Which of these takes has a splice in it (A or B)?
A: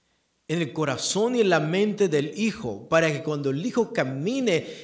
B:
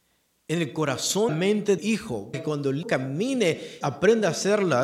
B